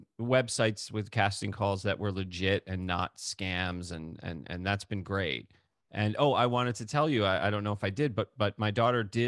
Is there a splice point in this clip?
no; 0 cuts

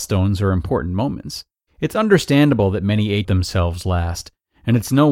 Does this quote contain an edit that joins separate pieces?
yes; 2 cuts; at 1.5 s, 3.2 s

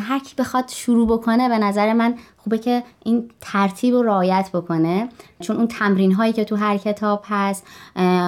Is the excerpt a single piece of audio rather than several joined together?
yes; 0 cuts

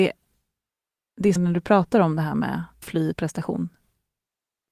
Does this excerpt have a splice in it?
yes; 3 cuts; at 1.4 s, 2.8 s, 3.1 s

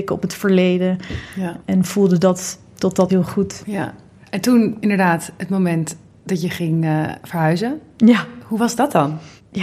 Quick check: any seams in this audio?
yes; 1 cut; at 3.1 s

